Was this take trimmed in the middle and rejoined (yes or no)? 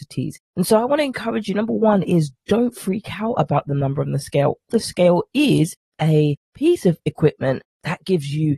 no